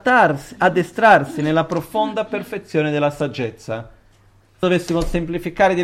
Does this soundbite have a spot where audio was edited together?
yes; 1 cut; at 4.6 s

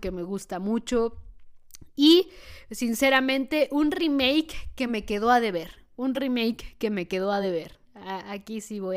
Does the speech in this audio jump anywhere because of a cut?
no; 0 cuts

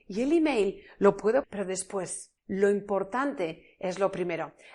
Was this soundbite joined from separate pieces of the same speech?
yes; 2 cuts; at 1.4 s, 2.4 s

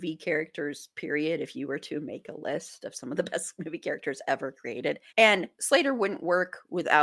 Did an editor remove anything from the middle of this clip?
yes; 1 cut; at 5.1 s

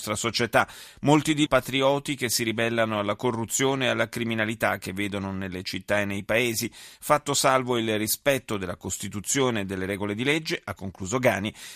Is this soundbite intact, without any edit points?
no; 1 cut; at 1.5 s

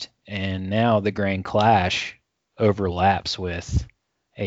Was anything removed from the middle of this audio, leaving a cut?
no; 0 cuts

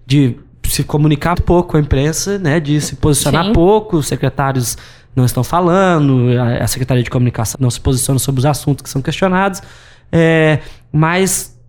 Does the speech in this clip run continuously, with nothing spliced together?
no; 2 cuts; at 1.3 s, 7.5 s

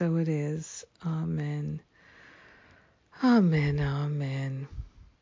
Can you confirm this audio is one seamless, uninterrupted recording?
yes; 0 cuts

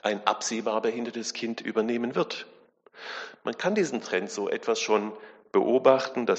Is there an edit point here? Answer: no; 0 cuts

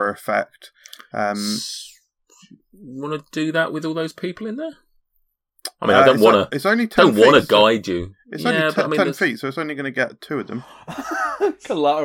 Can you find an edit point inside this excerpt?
no; 0 cuts

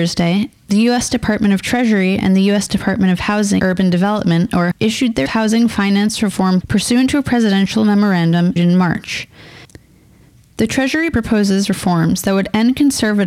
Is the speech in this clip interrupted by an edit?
yes; 6 cuts; at 3.6 s, 4.7 s, 5.3 s, 6.6 s, 8.6 s, 11.1 s

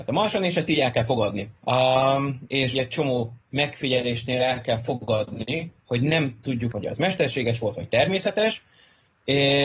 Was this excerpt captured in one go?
no; 4 cuts; at 1.6 s, 2.7 s, 5.8 s, 6.7 s

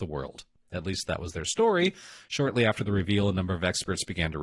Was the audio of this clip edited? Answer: no; 0 cuts

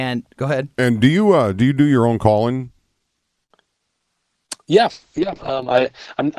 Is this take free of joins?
yes; 0 cuts

